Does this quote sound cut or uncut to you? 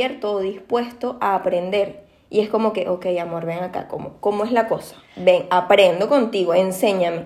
uncut